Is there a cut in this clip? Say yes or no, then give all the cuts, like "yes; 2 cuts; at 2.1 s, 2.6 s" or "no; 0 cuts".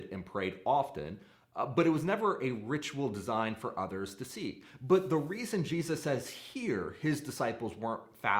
no; 0 cuts